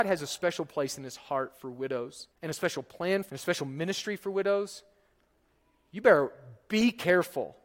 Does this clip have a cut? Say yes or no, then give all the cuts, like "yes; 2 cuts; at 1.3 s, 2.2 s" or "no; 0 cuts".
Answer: yes; 2 cuts; at 2.3 s, 3.3 s